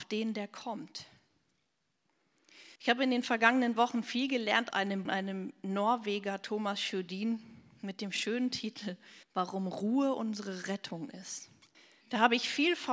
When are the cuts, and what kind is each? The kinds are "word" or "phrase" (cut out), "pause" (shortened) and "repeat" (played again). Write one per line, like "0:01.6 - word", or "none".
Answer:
0:02.8 - pause
0:04.7 - word
0:05.1 - phrase
0:09.2 - pause
0:11.7 - pause